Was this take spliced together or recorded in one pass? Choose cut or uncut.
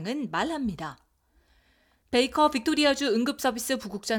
uncut